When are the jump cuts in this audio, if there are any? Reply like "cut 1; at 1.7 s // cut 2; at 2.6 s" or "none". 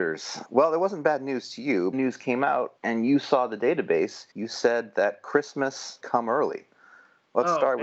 cut 1; at 1.9 s // cut 2; at 2.8 s // cut 3; at 4.3 s // cut 4; at 6.0 s